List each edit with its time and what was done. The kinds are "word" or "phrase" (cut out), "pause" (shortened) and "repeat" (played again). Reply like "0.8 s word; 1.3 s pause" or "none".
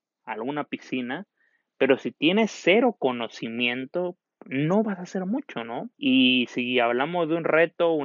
4.2 s pause; 5.9 s pause